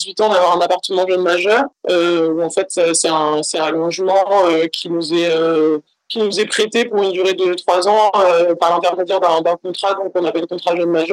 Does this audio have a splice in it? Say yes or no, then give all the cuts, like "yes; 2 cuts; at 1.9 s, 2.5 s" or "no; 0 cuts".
no; 0 cuts